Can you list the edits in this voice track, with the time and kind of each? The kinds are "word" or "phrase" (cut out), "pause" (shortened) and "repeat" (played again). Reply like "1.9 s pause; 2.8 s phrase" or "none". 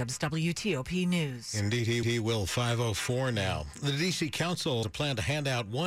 2.0 s repeat; 4.8 s word